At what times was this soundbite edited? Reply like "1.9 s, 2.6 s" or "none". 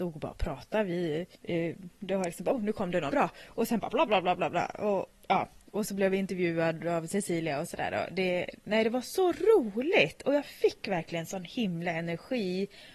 1.3 s, 3.1 s, 4.1 s